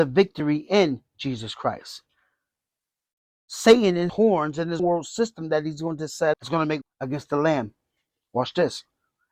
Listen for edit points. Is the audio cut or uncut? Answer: cut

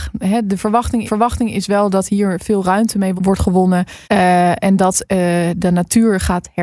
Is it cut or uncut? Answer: cut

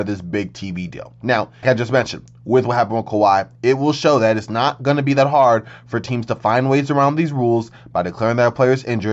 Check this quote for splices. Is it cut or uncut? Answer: cut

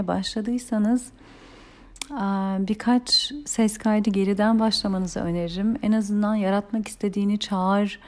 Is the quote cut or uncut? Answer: uncut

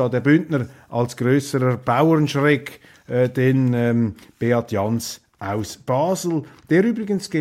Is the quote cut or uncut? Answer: uncut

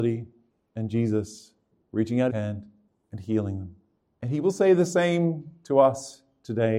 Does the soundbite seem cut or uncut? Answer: cut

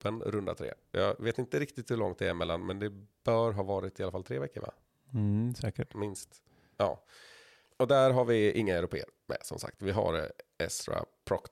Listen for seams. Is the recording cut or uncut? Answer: uncut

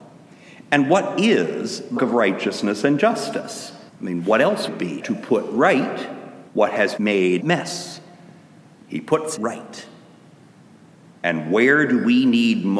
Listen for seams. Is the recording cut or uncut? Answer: cut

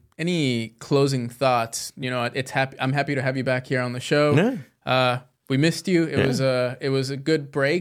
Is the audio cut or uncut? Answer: uncut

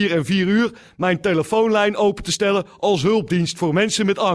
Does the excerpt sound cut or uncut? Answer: uncut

